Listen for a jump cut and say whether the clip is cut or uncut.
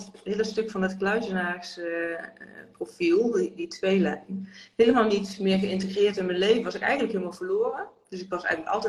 uncut